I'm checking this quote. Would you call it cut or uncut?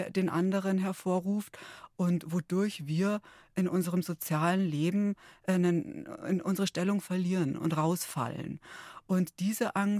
uncut